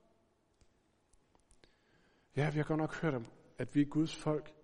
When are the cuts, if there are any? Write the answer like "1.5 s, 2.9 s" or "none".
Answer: none